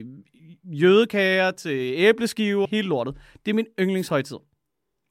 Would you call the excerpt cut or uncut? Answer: cut